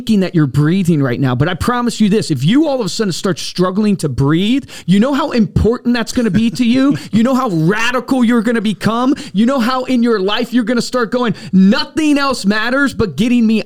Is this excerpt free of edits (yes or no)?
yes